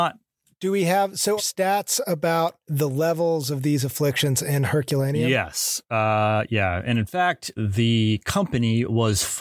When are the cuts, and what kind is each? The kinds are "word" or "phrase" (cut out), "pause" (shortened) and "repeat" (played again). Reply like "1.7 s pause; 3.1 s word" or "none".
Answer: 1.4 s phrase; 2.6 s pause; 7.6 s word